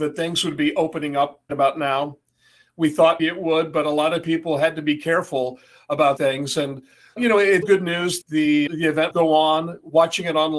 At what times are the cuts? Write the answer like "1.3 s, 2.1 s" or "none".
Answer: 1.5 s, 3.2 s, 6.2 s, 7.2 s, 7.6 s, 8.2 s, 8.7 s, 9.1 s